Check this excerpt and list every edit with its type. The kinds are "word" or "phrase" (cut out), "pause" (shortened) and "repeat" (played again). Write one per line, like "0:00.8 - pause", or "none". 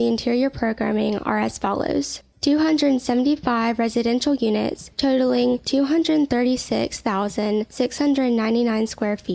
none